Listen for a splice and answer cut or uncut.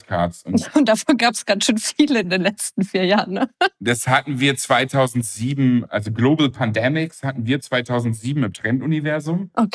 uncut